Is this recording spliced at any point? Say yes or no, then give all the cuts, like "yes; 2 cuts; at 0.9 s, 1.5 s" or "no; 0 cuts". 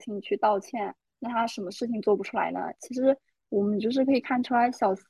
no; 0 cuts